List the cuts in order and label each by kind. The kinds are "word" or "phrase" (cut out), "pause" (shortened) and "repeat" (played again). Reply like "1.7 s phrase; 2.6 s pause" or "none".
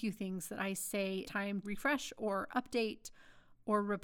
1.2 s word; 1.6 s word